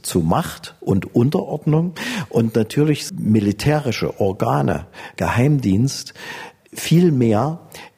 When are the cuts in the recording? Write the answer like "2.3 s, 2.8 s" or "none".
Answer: 3.1 s, 5.2 s